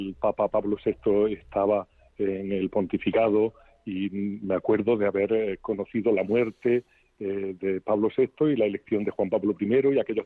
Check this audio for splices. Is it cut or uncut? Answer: uncut